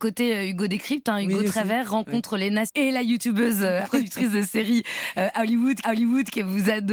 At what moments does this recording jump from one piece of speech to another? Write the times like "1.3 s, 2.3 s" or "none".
2.7 s, 3.8 s, 5.8 s